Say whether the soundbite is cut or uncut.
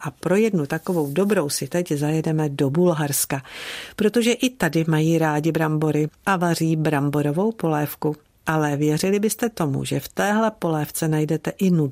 uncut